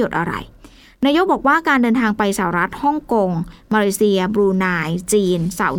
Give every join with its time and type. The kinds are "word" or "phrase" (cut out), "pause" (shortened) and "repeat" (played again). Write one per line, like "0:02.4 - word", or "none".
none